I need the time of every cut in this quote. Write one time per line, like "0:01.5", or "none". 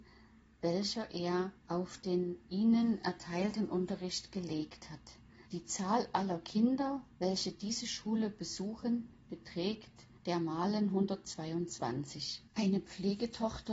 0:01.6
0:05.5
0:10.2
0:12.5